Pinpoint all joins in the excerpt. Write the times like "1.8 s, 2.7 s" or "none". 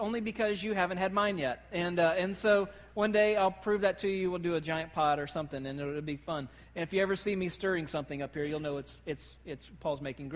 none